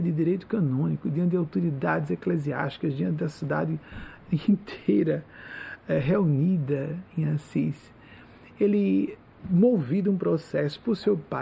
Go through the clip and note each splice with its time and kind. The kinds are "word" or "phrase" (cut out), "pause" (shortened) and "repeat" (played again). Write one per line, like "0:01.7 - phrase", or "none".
0:09.3 - pause